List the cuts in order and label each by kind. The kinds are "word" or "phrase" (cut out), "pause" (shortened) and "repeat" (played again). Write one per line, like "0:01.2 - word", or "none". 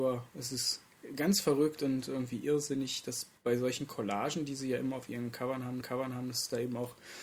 0:03.4 - pause
0:05.8 - repeat